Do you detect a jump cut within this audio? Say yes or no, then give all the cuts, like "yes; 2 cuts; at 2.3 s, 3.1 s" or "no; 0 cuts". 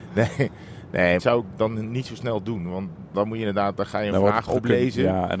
yes; 2 cuts; at 1.2 s, 3.1 s